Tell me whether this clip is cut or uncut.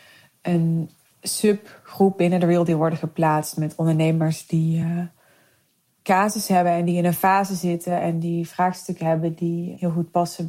uncut